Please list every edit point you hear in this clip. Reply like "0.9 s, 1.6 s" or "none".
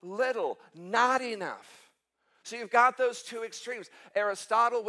none